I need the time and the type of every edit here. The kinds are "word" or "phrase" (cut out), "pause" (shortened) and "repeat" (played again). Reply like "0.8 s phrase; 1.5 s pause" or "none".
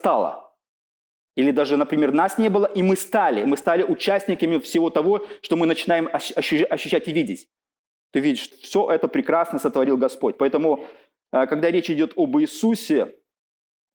8.5 s word